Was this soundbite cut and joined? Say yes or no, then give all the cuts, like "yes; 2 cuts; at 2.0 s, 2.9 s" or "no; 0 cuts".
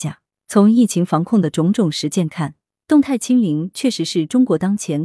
no; 0 cuts